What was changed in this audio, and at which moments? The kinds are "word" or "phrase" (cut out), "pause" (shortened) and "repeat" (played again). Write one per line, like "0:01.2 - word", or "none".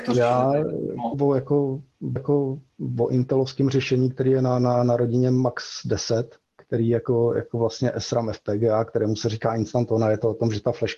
0:01.1 - phrase
0:02.2 - repeat
0:06.4 - pause